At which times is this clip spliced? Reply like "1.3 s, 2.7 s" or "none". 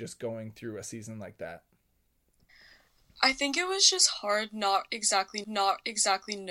5.4 s